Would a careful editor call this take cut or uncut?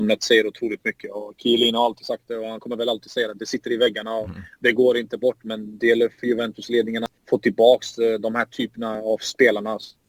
cut